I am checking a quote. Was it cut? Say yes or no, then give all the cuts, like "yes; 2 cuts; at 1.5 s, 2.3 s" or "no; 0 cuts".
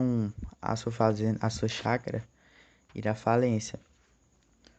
no; 0 cuts